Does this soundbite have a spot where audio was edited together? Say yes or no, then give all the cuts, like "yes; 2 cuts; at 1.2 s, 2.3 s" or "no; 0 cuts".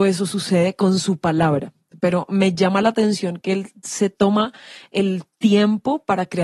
no; 0 cuts